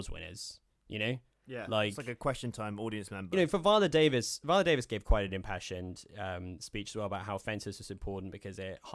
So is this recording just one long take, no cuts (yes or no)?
yes